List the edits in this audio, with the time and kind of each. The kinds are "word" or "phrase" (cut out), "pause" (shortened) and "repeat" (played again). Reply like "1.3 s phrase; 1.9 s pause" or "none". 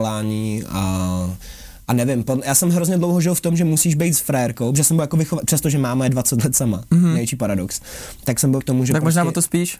8.6 s word

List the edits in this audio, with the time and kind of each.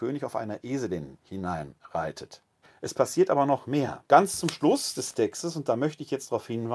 2.6 s pause; 4.1 s pause

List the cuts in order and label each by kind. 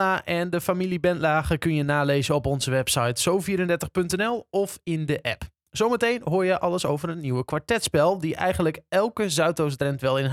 none

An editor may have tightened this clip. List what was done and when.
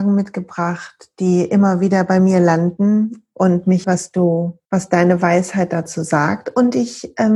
3.8 s word; 4.6 s pause

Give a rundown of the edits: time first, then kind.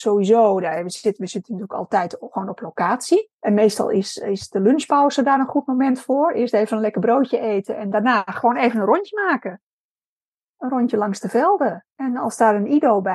3.3 s pause

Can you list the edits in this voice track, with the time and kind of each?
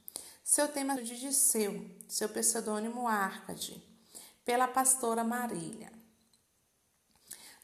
1.0 s phrase

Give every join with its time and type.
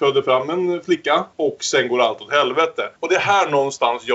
1.3 s pause; 3.0 s pause

